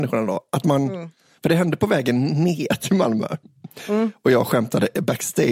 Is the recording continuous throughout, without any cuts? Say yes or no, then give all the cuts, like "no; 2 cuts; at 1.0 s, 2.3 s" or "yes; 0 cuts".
yes; 0 cuts